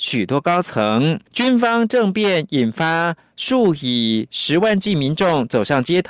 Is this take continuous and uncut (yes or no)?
no